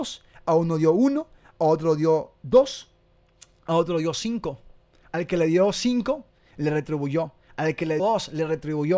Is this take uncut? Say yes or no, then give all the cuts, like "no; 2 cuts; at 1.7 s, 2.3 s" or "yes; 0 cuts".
no; 1 cut; at 8.0 s